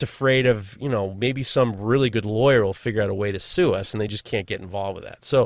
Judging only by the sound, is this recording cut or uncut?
uncut